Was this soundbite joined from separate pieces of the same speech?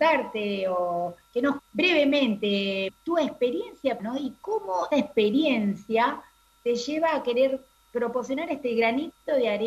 yes; 6 cuts; at 1.6 s, 2.9 s, 4.0 s, 4.9 s, 6.6 s, 7.7 s

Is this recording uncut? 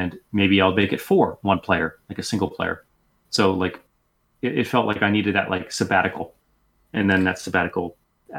yes; 0 cuts

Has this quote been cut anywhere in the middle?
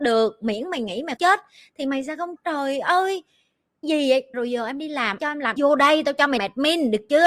yes; 7 cuts; at 1.2 s, 2.4 s, 3.8 s, 4.3 s, 5.2 s, 5.6 s, 6.4 s

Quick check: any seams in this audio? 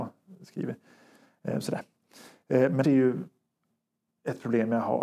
yes; 1 cut; at 2.8 s

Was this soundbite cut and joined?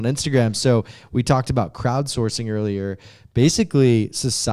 no; 0 cuts

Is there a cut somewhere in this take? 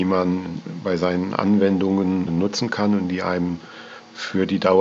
no; 0 cuts

